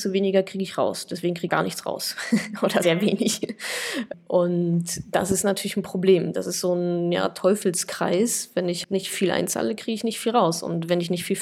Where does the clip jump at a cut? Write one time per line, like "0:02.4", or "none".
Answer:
0:01.5
0:02.8
0:08.8